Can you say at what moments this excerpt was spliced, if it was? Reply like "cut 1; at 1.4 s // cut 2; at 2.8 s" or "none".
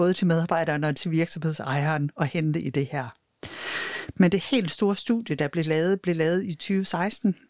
none